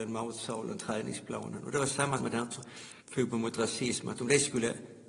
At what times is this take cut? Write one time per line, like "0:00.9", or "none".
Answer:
0:02.2
0:03.0